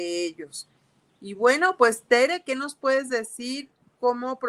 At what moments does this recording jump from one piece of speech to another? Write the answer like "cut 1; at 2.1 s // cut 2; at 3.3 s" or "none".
none